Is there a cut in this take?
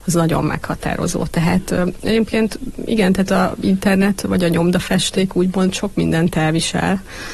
no; 0 cuts

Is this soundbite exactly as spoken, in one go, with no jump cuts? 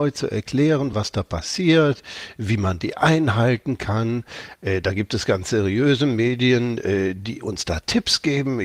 yes; 0 cuts

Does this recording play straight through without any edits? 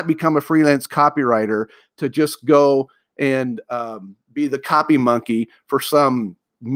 yes; 0 cuts

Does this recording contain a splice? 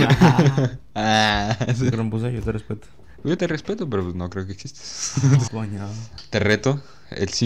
yes; 3 cuts; at 1.9 s, 3.4 s, 5.5 s

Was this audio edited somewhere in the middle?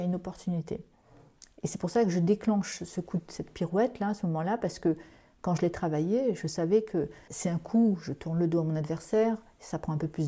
yes; 1 cut; at 7.3 s

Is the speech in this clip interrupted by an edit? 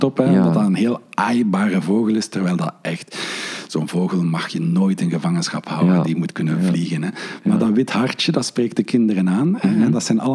no; 0 cuts

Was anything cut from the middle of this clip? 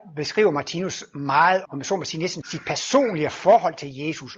yes; 2 cuts; at 1.7 s, 2.4 s

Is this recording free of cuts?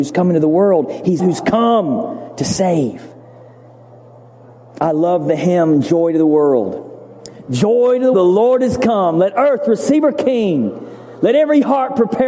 no; 2 cuts; at 1.2 s, 8.1 s

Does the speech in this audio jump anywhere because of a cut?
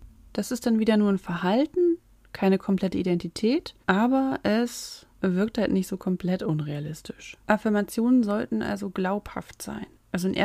yes; 3 cuts; at 3.8 s, 5.1 s, 7.4 s

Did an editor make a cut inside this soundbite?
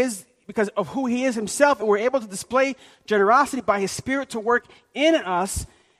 no; 0 cuts

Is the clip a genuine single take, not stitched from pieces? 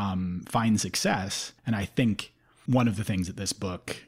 no; 2 cuts; at 1.6 s, 2.7 s

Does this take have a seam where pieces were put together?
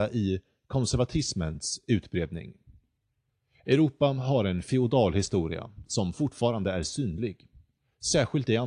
no; 0 cuts

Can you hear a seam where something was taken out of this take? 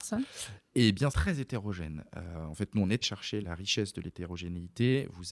yes; 3 cuts; at 1.1 s, 3.0 s, 3.4 s

